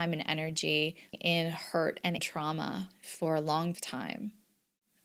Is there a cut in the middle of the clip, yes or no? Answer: yes